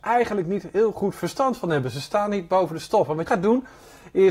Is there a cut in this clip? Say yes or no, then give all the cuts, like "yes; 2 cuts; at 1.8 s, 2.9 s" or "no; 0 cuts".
yes; 1 cut; at 3.3 s